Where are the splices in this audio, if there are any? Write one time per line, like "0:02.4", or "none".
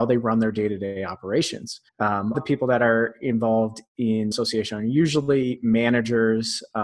0:01.9
0:02.3
0:04.3